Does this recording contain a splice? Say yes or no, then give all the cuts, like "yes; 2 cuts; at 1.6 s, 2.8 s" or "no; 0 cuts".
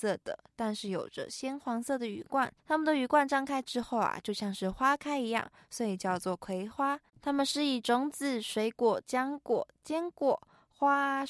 yes; 2 cuts; at 2.6 s, 7.1 s